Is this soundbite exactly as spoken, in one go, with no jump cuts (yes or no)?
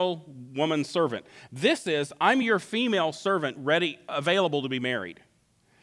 yes